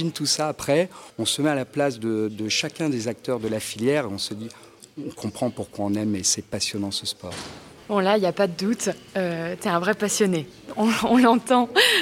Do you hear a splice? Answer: yes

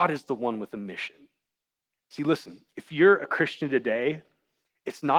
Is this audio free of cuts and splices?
yes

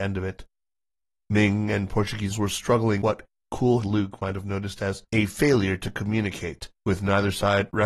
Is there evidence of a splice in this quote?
yes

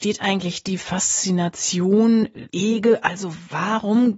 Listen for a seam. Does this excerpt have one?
yes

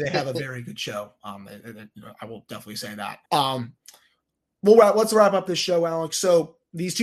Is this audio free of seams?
no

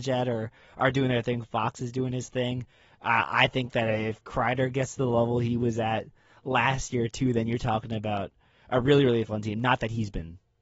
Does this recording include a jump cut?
no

